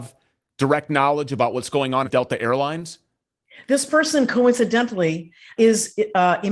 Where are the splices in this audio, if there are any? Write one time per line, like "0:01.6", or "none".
0:02.0
0:05.6